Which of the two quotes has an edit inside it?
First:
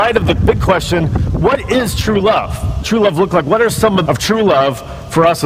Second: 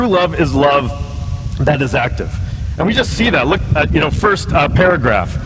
first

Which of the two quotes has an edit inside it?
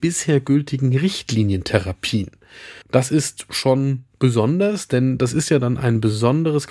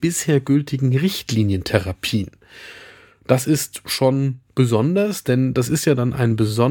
first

